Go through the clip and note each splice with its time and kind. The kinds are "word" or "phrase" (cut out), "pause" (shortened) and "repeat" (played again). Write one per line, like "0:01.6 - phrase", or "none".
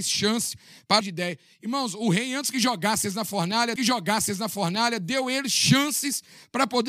0:01.0 - word
0:03.8 - repeat